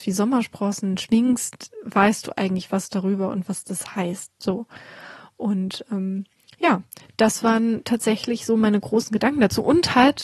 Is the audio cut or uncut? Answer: uncut